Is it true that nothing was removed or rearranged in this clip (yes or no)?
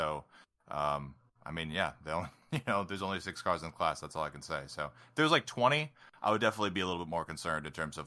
yes